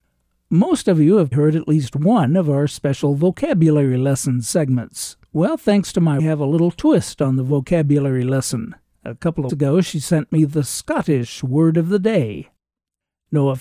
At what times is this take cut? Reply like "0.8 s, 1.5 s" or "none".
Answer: 1.3 s, 5.3 s, 6.2 s, 8.9 s, 9.5 s